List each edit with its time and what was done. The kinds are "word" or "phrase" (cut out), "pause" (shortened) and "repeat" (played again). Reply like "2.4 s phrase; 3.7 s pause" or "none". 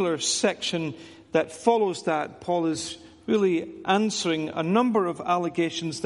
none